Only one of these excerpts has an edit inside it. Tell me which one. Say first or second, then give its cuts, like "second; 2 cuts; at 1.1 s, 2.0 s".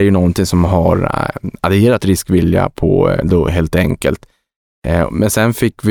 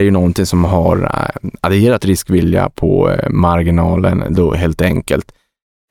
first; 1 cut; at 3.2 s